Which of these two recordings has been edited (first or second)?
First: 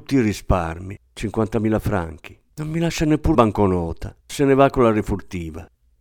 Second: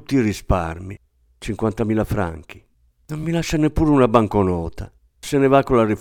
first